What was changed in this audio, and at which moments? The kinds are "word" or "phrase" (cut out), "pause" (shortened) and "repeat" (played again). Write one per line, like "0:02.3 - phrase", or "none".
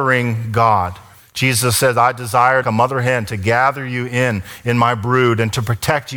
0:02.6 - word